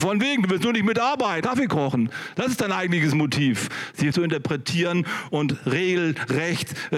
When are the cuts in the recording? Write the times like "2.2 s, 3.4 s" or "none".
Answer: 1.4 s, 4.1 s